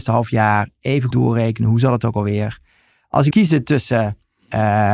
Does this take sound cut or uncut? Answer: cut